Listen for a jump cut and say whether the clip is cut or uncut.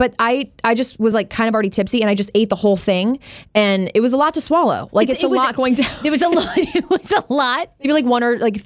uncut